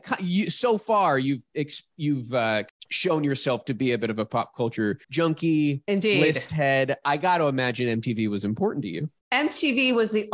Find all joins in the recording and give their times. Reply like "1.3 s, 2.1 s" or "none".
5.0 s

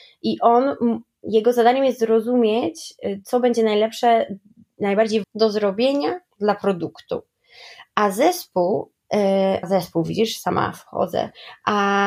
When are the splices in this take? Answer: 5.2 s, 9.6 s

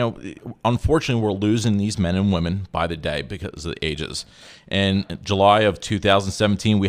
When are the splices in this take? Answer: none

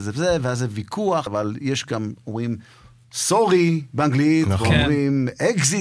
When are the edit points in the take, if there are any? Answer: 1.3 s

